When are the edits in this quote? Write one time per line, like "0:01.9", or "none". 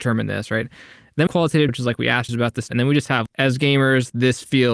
0:01.3
0:01.7
0:02.3
0:02.7
0:03.3